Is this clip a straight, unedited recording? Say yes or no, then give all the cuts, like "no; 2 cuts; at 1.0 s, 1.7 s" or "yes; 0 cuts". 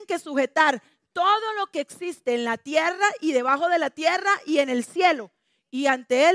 yes; 0 cuts